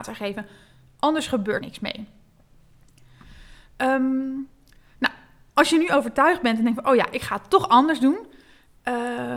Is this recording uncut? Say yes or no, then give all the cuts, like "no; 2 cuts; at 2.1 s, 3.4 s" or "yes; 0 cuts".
no; 1 cut; at 1.6 s